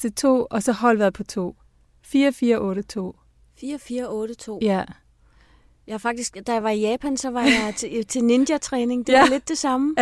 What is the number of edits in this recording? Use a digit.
0